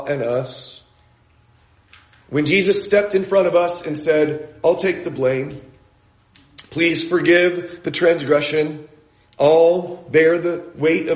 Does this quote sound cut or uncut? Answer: uncut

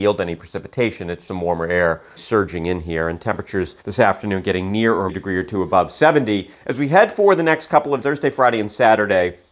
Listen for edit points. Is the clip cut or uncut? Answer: cut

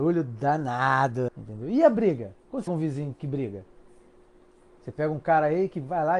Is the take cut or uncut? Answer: cut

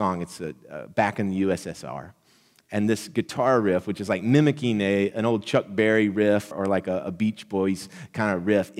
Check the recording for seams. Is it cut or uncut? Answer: cut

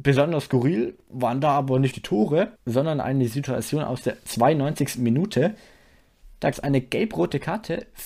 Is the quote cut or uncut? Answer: cut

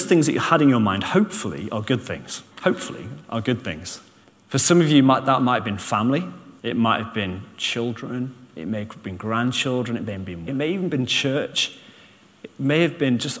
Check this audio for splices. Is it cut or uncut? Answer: cut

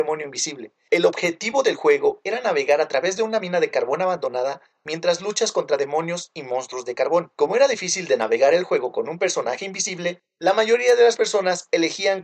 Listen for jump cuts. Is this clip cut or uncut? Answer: uncut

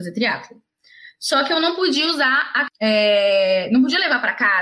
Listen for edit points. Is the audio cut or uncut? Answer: cut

